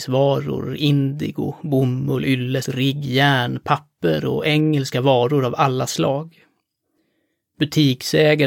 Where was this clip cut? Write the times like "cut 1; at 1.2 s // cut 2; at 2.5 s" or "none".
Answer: cut 1; at 2.6 s